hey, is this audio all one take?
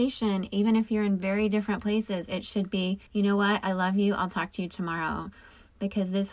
no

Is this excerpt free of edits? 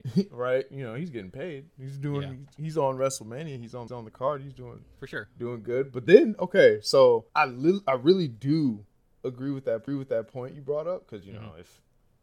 no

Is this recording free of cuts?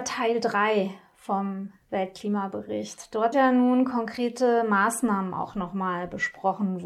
no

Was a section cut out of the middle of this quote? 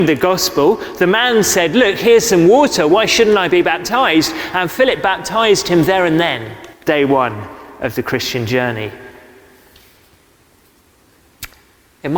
yes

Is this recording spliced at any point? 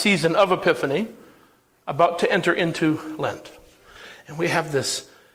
no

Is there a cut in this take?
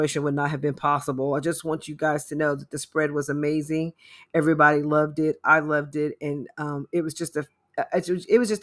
no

